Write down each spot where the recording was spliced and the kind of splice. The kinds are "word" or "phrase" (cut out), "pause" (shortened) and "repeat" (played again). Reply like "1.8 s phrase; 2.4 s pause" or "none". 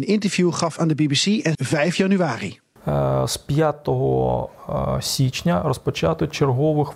1.5 s phrase